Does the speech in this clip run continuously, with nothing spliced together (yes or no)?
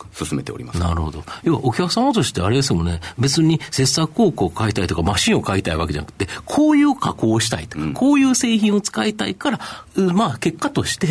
no